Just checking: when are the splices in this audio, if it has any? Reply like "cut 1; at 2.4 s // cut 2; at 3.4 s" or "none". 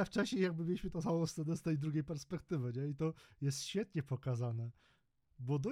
none